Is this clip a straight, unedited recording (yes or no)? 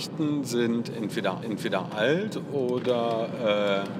no